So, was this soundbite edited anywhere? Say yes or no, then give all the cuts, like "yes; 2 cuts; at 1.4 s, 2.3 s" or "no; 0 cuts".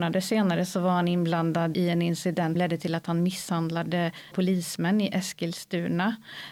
yes; 3 cuts; at 1.7 s, 2.6 s, 4.3 s